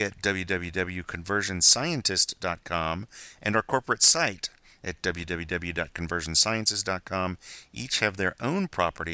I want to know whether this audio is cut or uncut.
uncut